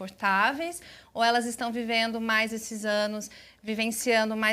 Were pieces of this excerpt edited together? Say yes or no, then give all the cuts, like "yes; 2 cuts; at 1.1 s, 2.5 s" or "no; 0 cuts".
no; 0 cuts